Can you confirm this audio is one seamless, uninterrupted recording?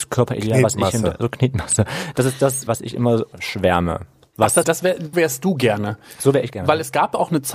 no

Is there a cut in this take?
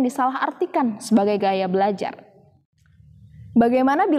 no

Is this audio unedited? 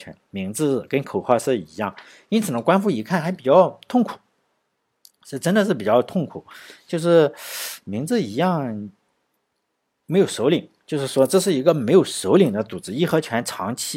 yes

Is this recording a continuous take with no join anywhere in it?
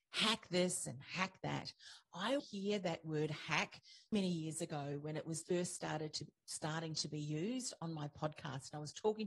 no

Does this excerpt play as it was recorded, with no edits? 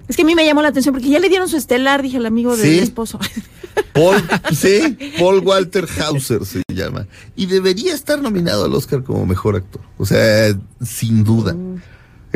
yes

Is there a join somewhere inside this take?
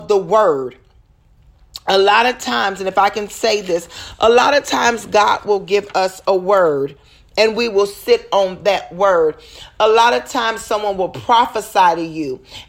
no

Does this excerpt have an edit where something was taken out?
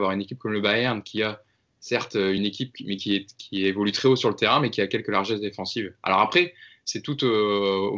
no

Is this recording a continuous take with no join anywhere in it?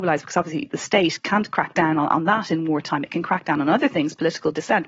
no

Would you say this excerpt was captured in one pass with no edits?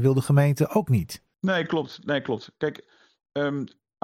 no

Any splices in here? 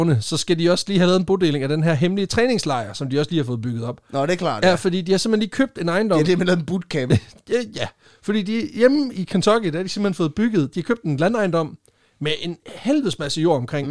no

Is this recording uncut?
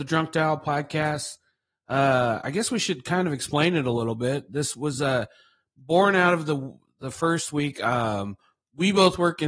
yes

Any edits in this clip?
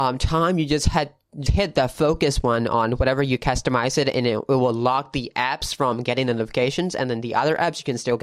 yes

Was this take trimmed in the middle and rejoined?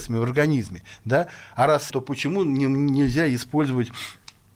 yes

